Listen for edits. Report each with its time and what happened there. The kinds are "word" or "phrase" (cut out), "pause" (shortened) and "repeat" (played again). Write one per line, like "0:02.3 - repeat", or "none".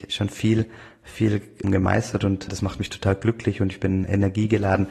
0:01.6 - word
0:02.5 - word

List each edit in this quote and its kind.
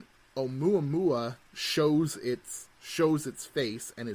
0:01.5 - pause
0:02.7 - pause

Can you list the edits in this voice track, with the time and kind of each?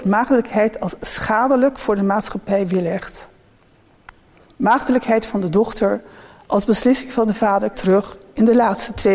0:07.7 - phrase

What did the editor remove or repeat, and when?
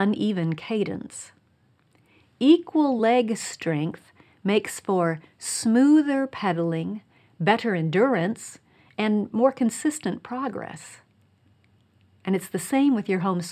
none

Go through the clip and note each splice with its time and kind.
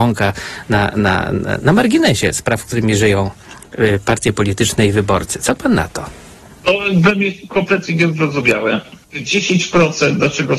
0:06.4 - pause
0:09.0 - pause

